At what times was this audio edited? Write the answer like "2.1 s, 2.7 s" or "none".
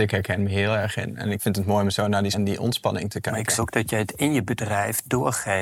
1.4 s, 2.3 s, 3.6 s